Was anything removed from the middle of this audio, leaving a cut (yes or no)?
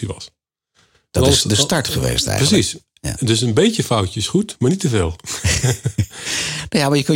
no